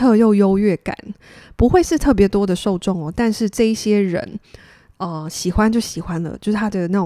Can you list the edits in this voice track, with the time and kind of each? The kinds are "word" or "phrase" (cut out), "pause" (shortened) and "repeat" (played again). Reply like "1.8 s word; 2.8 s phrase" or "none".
none